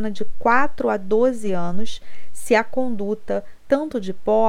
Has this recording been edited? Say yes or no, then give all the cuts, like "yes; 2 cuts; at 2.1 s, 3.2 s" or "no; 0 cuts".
no; 0 cuts